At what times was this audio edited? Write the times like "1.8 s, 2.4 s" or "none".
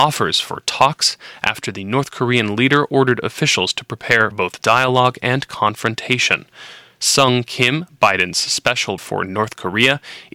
4.3 s, 9.0 s